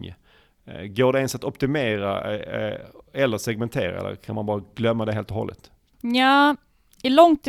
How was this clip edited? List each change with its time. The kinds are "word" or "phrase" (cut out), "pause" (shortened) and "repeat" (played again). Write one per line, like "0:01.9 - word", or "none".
none